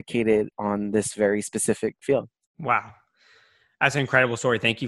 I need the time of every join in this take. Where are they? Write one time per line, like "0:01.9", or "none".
0:02.0
0:02.5